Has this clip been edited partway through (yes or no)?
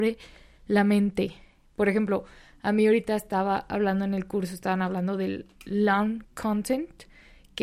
no